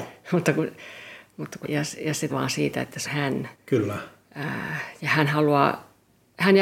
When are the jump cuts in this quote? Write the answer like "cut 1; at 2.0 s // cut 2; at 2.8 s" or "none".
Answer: cut 1; at 1.6 s // cut 2; at 2.3 s // cut 3; at 3.0 s // cut 4; at 3.5 s